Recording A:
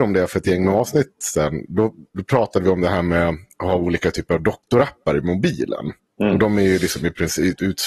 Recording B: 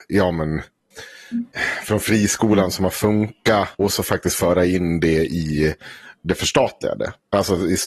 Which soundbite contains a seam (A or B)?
B